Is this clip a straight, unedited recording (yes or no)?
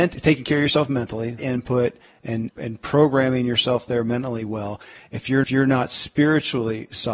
no